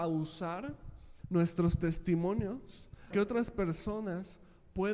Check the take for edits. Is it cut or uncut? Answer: cut